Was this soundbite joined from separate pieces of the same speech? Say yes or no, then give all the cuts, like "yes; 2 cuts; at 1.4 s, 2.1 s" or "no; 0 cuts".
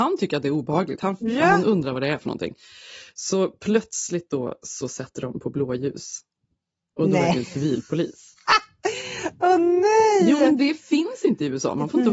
no; 0 cuts